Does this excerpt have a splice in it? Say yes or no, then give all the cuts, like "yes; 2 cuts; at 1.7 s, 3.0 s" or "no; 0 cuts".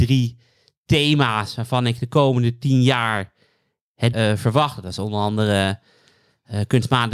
yes; 1 cut; at 4.1 s